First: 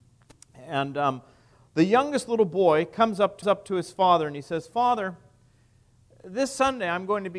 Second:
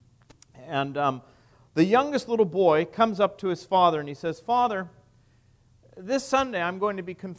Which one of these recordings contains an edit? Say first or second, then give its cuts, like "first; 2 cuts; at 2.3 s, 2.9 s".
first; 1 cut; at 3.4 s